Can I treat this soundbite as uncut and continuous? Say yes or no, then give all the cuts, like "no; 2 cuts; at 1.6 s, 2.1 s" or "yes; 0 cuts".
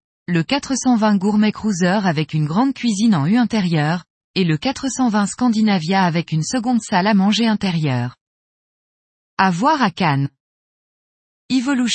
yes; 0 cuts